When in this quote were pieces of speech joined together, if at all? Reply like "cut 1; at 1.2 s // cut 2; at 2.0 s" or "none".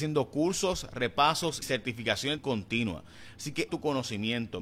cut 1; at 1.6 s // cut 2; at 2.4 s // cut 3; at 3.7 s